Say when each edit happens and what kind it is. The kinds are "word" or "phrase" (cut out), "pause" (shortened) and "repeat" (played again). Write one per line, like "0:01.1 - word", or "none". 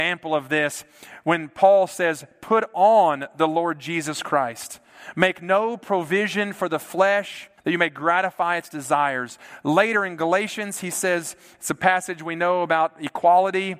0:07.6 - pause